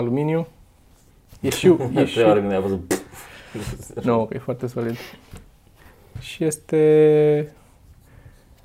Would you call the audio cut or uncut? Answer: uncut